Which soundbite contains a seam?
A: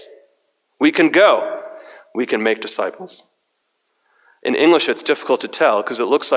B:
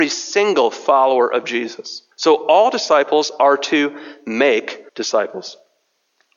B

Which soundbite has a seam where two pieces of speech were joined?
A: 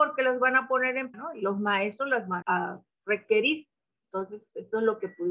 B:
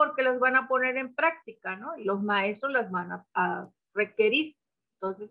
A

